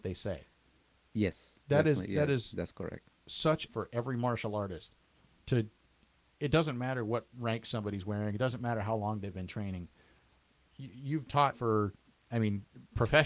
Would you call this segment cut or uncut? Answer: cut